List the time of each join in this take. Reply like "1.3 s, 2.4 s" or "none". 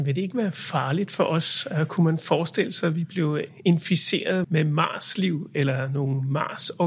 4.4 s

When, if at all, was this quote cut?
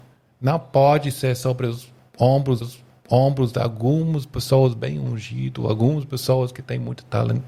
2.6 s

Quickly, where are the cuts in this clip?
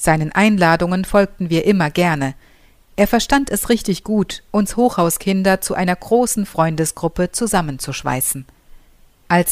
none

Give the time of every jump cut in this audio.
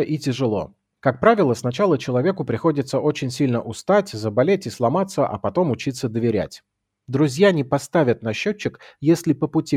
none

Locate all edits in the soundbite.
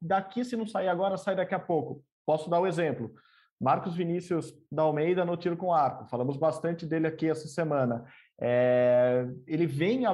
none

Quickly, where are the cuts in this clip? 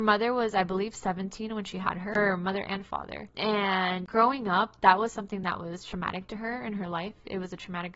none

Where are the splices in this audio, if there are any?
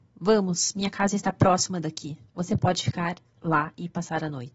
2.3 s

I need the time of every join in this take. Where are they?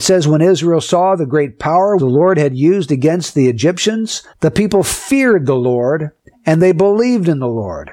2.0 s, 4.3 s

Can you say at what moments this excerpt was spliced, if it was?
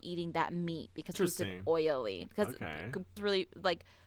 1.1 s, 3.2 s

